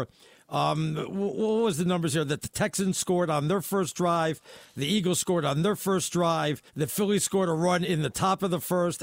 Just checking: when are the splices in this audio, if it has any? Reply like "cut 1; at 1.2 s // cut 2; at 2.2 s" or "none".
cut 1; at 6.7 s